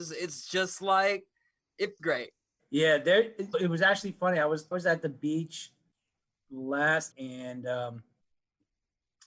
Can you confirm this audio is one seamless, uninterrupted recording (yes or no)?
no